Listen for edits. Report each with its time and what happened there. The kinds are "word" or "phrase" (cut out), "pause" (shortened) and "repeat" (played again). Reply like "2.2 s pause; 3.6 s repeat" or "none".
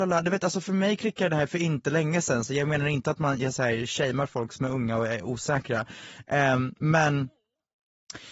none